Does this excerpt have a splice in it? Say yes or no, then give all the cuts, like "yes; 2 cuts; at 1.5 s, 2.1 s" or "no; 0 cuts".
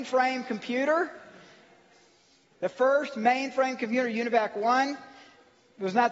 no; 0 cuts